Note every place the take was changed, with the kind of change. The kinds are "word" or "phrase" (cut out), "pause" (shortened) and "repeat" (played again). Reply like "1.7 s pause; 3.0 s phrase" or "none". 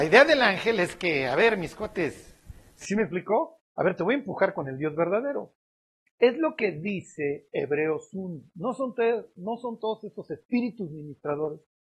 none